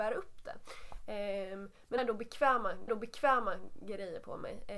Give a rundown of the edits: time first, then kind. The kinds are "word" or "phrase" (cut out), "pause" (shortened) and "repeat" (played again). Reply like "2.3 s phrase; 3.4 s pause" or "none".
2.0 s word; 2.9 s repeat